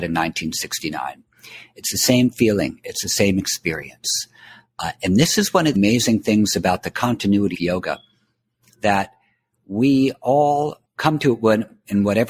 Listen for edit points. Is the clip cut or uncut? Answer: cut